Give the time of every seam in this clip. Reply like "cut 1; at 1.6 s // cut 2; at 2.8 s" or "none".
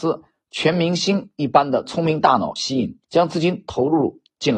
cut 1; at 3.0 s